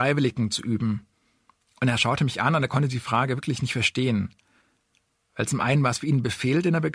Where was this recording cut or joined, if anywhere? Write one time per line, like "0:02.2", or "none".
none